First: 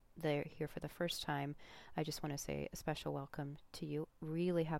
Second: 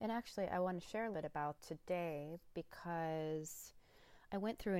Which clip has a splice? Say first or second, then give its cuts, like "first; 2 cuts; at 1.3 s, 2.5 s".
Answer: second; 2 cuts; at 1.1 s, 1.6 s